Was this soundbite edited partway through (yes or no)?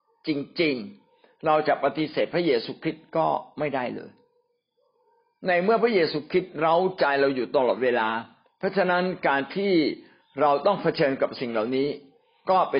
yes